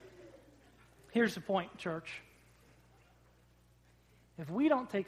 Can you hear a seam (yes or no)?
no